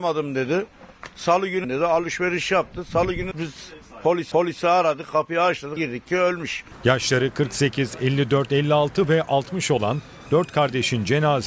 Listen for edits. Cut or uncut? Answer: cut